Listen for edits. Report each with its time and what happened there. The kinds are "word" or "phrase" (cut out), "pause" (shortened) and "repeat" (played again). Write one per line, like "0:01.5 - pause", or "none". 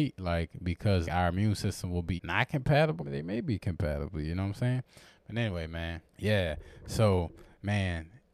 0:01.0 - word
0:02.2 - word
0:03.0 - phrase
0:06.1 - pause